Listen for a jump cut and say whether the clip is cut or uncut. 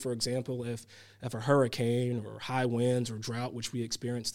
uncut